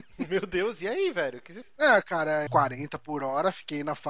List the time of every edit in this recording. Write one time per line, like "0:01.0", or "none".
0:01.6
0:02.5

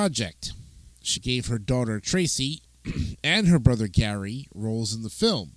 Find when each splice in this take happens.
0:01.2

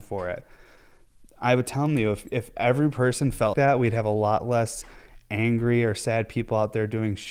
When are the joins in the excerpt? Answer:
0:03.5

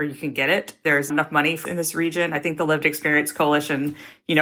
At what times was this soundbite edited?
0:01.1
0:01.6

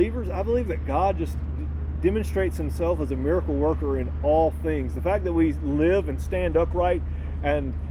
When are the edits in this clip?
none

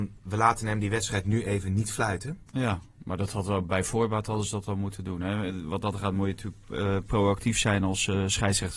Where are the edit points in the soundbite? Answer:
0:02.5

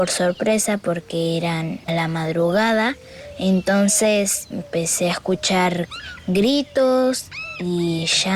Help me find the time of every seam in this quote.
0:01.9
0:04.5

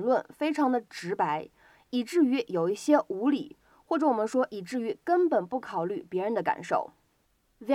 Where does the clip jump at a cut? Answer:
none

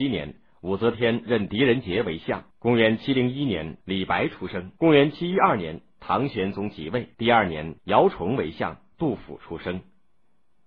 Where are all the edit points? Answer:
0:02.5
0:03.8
0:04.8
0:07.1
0:07.8

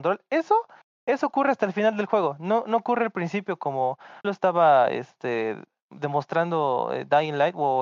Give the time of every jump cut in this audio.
0:04.2

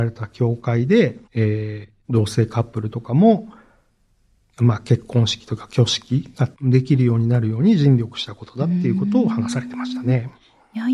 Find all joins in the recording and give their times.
0:01.2
0:02.0
0:06.5

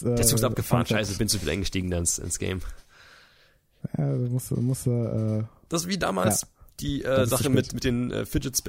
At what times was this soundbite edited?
none

